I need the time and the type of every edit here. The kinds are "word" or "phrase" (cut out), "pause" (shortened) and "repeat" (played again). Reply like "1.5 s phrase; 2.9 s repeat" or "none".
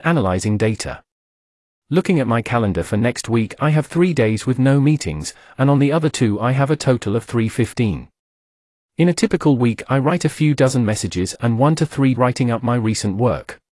12.1 s word

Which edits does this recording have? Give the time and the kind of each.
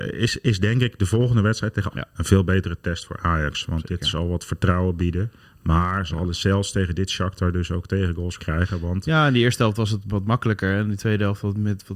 1.9 s word; 8.4 s word

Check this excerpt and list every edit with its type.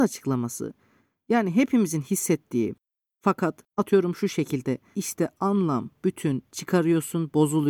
3.7 s pause; 4.9 s word

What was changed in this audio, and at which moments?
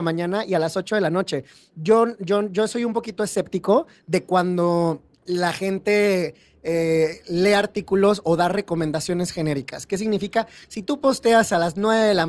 none

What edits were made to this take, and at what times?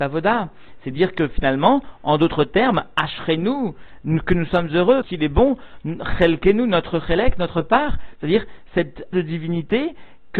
5.0 s word; 9.1 s word

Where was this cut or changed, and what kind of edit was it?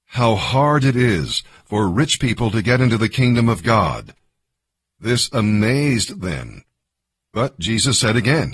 none

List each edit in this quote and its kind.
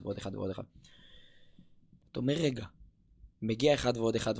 3.3 s pause

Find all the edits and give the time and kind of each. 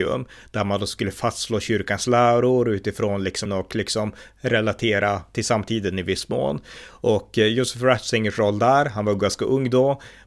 3.5 s phrase

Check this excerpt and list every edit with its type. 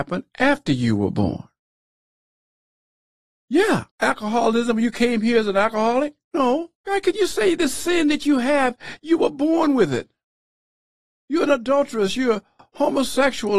3.9 s pause; 6.7 s pause

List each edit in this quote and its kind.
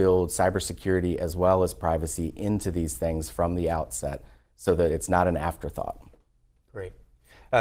none

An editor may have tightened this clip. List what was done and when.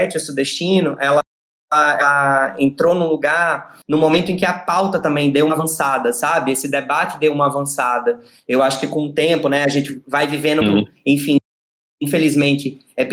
3.8 s pause; 10.6 s word

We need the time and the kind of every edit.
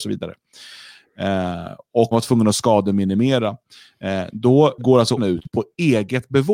2.1 s word; 4.8 s word; 5.2 s word

